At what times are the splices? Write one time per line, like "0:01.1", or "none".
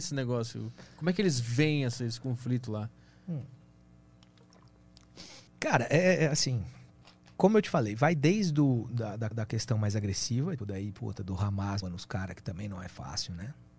0:05.5
0:07.0
0:09.3
0:10.6
0:11.8